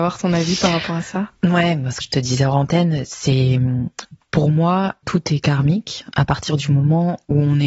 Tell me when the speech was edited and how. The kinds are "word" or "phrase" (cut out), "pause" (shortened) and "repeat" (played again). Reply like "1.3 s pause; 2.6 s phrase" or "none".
2.0 s word; 5.0 s word

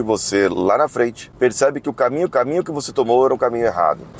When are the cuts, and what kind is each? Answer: 2.3 s repeat

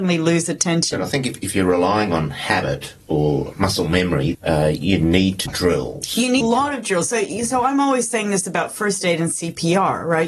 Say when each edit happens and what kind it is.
3.5 s word; 4.3 s word; 5.5 s word; 6.4 s phrase

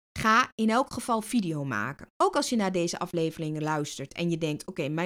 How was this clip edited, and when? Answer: 2.1 s pause

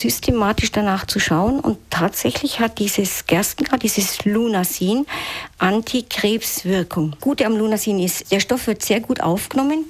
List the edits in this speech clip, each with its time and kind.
7.2 s word; 8.2 s word

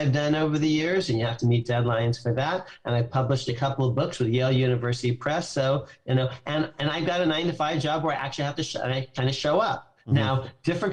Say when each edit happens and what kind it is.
none

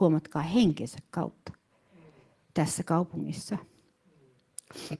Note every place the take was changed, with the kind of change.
none

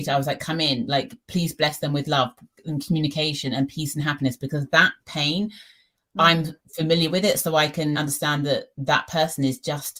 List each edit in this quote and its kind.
5.0 s pause; 7.9 s word

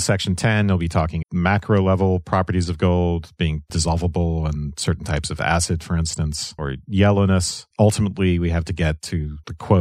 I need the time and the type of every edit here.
1.2 s word

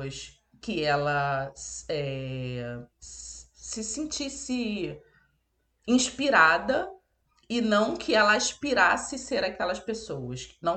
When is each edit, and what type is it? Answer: 2.9 s pause

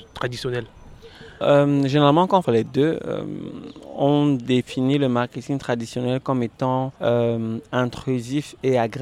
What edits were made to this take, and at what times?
1.4 s word; 2.4 s phrase; 7.0 s pause

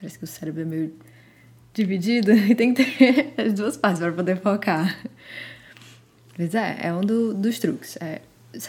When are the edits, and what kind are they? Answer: none

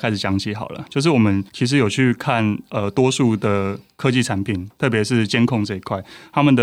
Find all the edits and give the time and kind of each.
1.5 s pause

